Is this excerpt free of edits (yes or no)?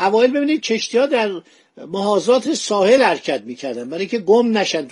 yes